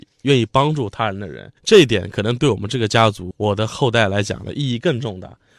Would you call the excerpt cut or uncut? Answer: cut